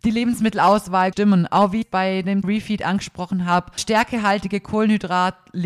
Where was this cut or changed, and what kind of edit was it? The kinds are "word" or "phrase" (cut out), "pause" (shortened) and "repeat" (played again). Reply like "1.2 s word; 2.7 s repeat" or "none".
1.1 s word; 1.8 s word; 2.4 s word; 3.8 s word